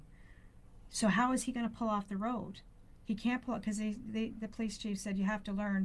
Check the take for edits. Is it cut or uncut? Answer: uncut